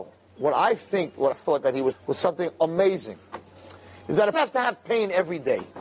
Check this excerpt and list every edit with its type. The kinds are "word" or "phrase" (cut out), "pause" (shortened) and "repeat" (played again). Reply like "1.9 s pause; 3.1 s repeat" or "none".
1.3 s word; 1.9 s word; 4.3 s word